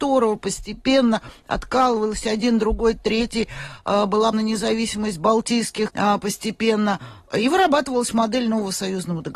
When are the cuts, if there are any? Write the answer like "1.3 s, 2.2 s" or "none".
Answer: 4.3 s, 5.9 s